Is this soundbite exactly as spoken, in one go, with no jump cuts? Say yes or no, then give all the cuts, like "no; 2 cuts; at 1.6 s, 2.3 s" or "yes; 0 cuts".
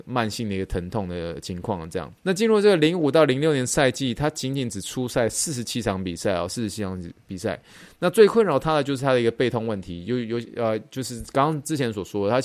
no; 1 cut; at 2.2 s